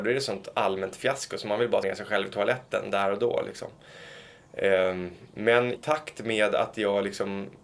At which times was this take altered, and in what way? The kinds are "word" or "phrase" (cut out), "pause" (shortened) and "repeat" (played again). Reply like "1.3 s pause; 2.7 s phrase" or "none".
1.8 s word; 5.8 s word